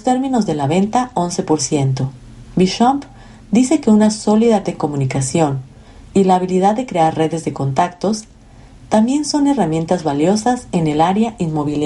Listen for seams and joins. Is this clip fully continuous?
no; 1 cut; at 4.6 s

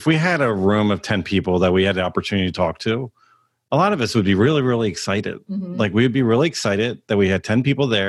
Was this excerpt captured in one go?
yes; 0 cuts

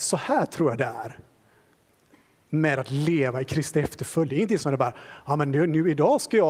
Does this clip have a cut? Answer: no; 0 cuts

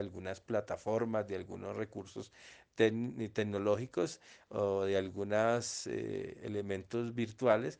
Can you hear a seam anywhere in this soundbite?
no; 0 cuts

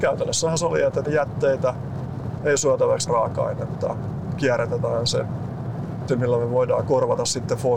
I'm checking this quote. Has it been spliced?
yes; 3 cuts; at 1.0 s, 3.1 s, 6.1 s

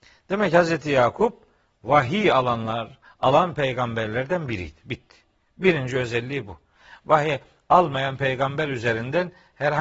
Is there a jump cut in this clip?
no; 0 cuts

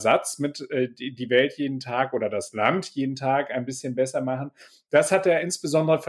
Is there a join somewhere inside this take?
no; 0 cuts

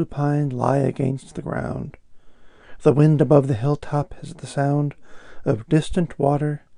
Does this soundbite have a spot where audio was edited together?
no; 0 cuts

